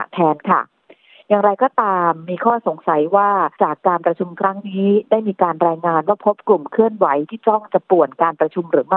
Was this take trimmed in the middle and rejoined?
yes; 1 cut; at 3.5 s

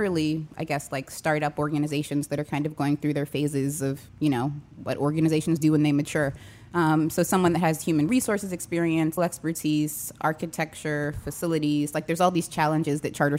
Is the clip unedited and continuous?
no; 2 cuts; at 4.1 s, 9.2 s

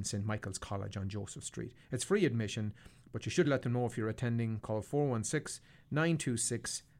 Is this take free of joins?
yes; 0 cuts

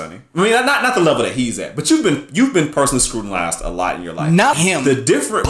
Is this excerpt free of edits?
no; 1 cut; at 4.5 s

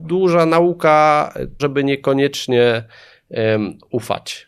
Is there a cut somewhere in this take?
yes; 1 cut; at 1.6 s

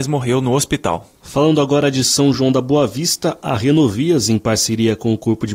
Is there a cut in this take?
no; 0 cuts

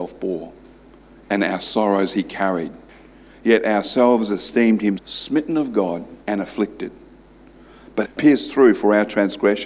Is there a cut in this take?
yes; 3 cuts; at 5.0 s, 6.2 s, 8.0 s

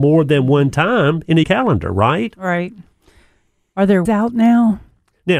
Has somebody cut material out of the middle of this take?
yes; 2 cuts; at 1.4 s, 4.1 s

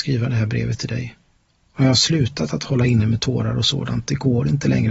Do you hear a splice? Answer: no; 0 cuts

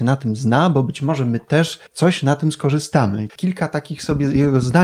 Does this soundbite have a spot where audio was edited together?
yes; 2 cuts; at 1.9 s, 3.3 s

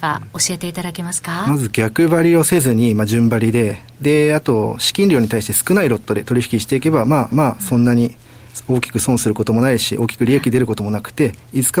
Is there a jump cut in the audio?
yes; 1 cut; at 7.3 s

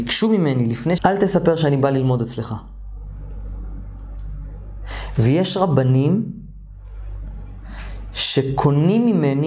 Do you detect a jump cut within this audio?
yes; 1 cut; at 1.0 s

